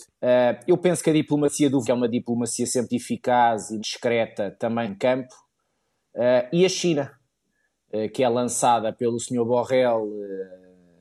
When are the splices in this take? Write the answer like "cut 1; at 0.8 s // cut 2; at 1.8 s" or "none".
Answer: cut 1; at 1.8 s // cut 2; at 2.9 s // cut 3; at 3.8 s // cut 4; at 4.9 s